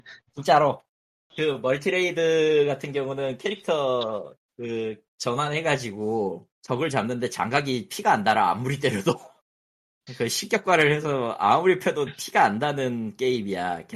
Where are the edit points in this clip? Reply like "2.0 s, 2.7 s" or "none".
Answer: 6.5 s